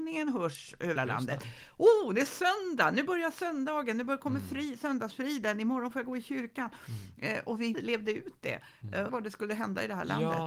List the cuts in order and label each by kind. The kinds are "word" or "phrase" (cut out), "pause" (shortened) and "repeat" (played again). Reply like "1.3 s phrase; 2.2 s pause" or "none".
1.0 s word; 7.7 s word; 9.1 s word